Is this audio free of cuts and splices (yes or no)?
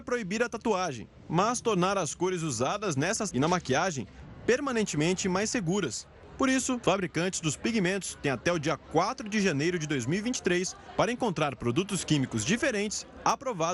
no